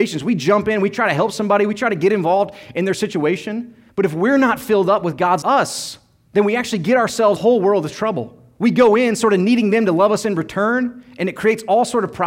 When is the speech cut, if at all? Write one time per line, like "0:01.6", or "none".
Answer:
0:03.9
0:05.4
0:07.4